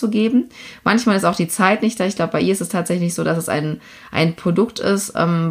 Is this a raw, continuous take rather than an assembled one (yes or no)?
yes